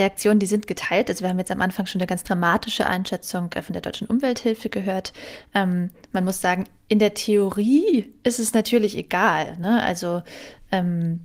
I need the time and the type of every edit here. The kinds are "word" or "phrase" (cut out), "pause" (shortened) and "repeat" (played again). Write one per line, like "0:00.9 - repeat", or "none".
none